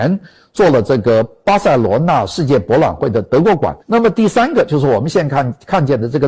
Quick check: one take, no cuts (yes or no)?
no